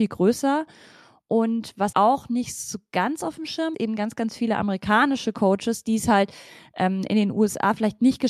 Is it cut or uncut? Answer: cut